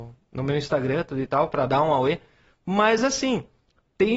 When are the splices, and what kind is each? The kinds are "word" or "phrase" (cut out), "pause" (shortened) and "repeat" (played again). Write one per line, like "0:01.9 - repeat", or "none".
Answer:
none